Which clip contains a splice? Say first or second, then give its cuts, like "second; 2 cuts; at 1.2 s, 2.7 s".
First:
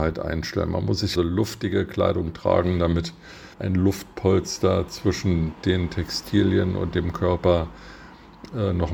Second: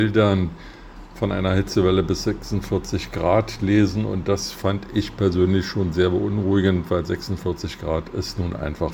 first; 2 cuts; at 1.2 s, 3.5 s